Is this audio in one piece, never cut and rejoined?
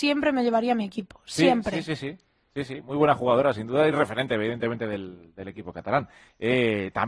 yes; 0 cuts

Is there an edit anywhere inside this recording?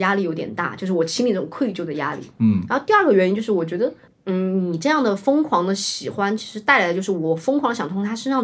no; 0 cuts

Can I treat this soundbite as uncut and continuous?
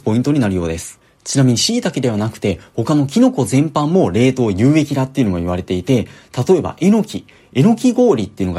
yes; 0 cuts

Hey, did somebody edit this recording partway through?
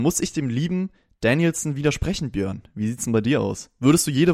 no; 0 cuts

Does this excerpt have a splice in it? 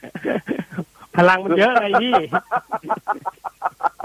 no; 0 cuts

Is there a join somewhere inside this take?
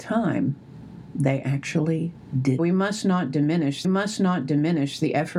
yes; 2 cuts; at 2.6 s, 3.8 s

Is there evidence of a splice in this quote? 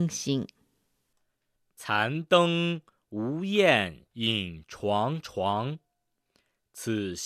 yes; 1 cut; at 4.1 s

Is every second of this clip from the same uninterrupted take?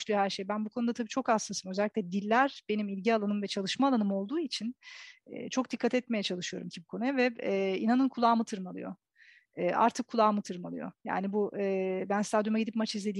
no; 1 cut; at 6.7 s

